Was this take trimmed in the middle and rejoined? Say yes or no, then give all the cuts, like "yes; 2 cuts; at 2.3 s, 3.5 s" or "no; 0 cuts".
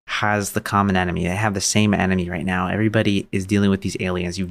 no; 0 cuts